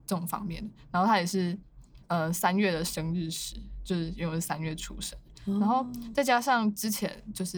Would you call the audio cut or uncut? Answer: cut